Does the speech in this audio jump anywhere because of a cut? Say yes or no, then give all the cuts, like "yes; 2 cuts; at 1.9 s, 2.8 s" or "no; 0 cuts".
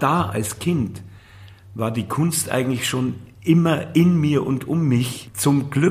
no; 0 cuts